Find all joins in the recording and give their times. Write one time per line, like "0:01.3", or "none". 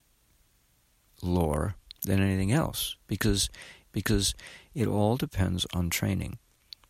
0:03.8

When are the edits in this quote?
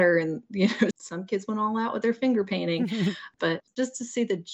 0:00.9

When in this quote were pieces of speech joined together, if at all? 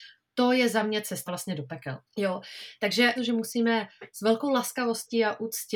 0:01.3
0:02.1
0:03.2

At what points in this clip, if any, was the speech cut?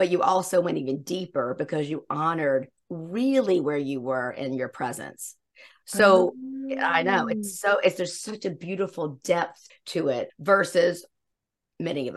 0:05.5
0:09.7
0:10.3

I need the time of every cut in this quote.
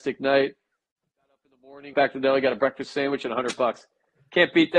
0:01.9

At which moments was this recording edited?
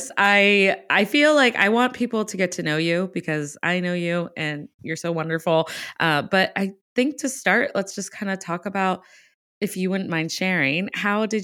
none

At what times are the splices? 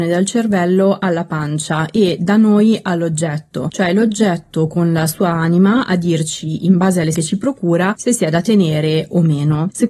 0:07.1

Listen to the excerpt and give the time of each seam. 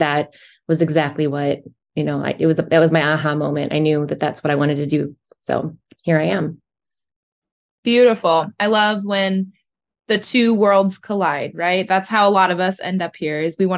none

